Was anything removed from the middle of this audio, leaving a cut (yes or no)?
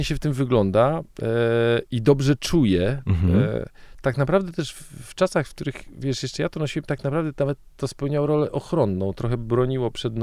no